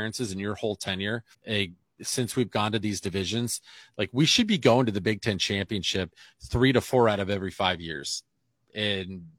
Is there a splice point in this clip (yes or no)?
yes